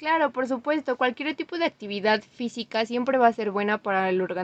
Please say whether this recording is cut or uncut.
uncut